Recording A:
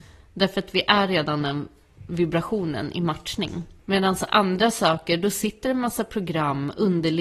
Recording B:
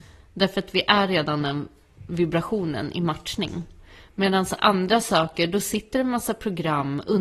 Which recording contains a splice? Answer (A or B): A